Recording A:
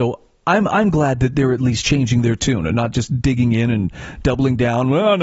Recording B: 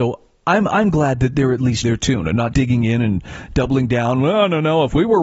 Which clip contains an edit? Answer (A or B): B